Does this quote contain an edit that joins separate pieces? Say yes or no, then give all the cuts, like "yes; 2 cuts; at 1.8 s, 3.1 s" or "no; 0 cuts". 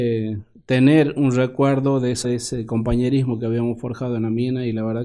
yes; 1 cut; at 2.2 s